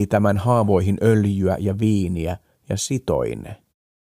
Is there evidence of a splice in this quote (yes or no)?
no